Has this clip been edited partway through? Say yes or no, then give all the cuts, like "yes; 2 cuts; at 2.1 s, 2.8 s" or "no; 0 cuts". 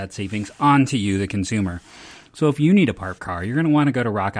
yes; 1 cut; at 3.2 s